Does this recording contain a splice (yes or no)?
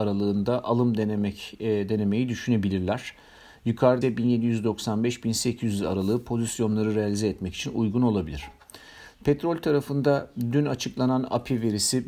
yes